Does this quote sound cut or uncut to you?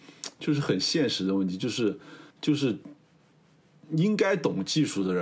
cut